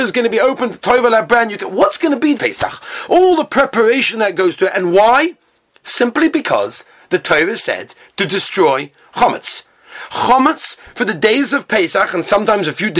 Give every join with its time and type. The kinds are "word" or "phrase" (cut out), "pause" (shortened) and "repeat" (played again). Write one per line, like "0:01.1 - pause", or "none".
0:02.4 - word